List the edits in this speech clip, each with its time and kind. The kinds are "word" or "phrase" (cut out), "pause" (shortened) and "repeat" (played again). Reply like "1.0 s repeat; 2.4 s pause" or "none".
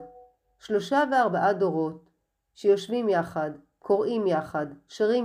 none